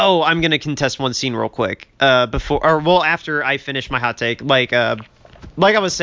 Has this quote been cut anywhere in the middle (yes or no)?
no